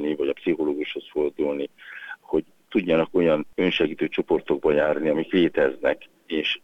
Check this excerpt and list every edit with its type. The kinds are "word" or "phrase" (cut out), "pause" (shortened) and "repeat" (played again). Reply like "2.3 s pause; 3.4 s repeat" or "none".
none